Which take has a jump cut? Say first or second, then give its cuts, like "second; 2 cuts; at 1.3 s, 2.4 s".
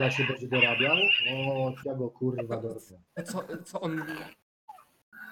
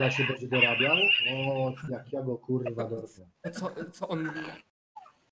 first; 1 cut; at 1.8 s